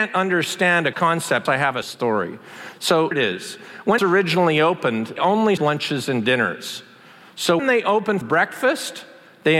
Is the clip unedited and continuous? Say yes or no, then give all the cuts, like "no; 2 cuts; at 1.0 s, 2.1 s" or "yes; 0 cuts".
no; 9 cuts; at 0.9 s, 1.5 s, 1.8 s, 3.1 s, 4.0 s, 5.2 s, 5.6 s, 7.6 s, 8.2 s